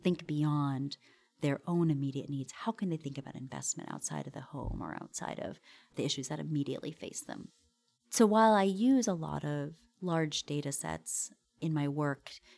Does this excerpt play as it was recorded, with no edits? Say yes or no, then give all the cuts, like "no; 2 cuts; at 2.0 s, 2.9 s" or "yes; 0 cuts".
yes; 0 cuts